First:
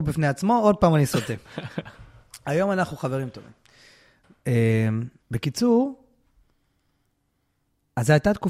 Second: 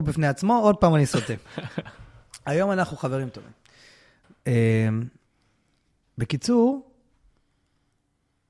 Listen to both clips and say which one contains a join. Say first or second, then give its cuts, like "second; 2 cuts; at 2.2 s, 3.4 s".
first; 1 cut; at 5.2 s